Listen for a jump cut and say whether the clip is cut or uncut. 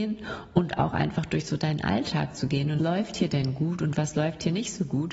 cut